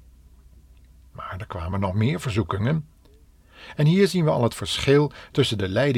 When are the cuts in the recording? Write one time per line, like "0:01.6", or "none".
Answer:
none